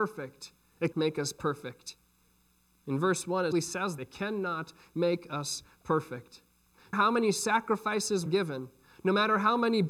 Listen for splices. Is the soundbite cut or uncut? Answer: cut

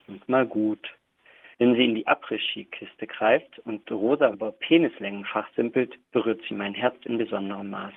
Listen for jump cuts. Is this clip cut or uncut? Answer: cut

